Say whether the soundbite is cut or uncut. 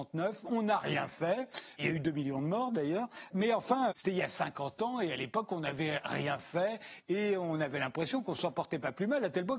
cut